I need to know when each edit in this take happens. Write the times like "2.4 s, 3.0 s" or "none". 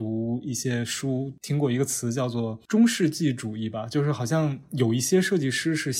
none